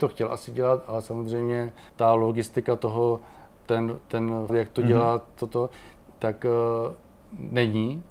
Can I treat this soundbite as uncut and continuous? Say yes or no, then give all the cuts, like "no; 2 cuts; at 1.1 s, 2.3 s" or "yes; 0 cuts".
no; 3 cuts; at 1.9 s, 3.5 s, 4.5 s